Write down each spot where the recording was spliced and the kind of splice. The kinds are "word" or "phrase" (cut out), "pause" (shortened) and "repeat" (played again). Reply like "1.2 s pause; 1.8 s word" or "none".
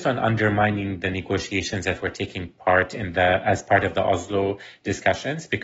none